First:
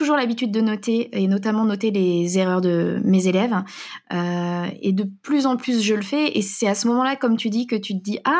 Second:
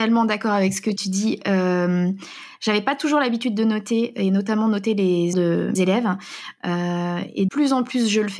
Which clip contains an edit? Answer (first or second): second